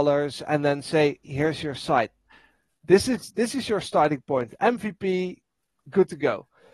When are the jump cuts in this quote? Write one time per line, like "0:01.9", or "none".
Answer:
0:01.2